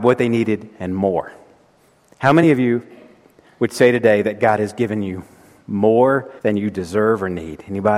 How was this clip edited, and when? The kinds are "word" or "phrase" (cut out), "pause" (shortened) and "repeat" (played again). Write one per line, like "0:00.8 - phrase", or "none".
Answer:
0:01.9 - pause
0:06.4 - pause